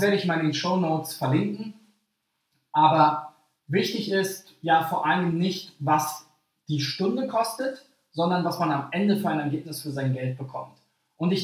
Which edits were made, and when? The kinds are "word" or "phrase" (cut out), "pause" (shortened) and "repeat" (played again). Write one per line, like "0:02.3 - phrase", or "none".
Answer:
none